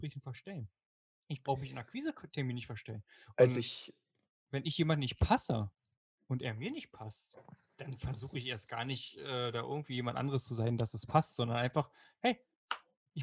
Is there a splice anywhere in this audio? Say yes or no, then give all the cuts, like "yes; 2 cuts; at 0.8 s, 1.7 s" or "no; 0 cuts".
no; 0 cuts